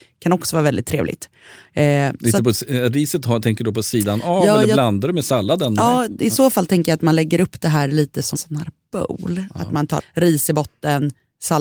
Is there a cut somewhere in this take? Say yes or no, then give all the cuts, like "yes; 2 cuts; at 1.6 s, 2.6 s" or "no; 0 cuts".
yes; 2 cuts; at 8.3 s, 10.0 s